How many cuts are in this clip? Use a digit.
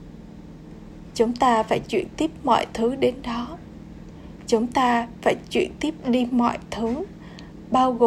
0